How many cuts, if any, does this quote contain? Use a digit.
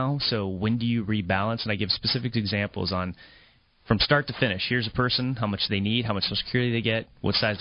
0